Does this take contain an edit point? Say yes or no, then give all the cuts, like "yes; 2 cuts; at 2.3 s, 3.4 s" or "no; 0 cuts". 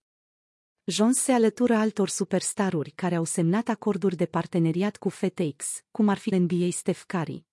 yes; 1 cut; at 6.3 s